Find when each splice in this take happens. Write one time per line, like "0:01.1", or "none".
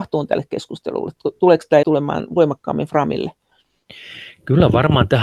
0:01.8